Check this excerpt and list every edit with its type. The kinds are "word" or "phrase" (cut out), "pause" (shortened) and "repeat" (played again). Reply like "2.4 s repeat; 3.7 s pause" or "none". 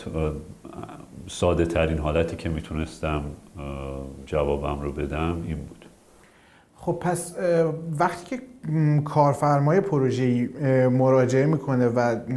none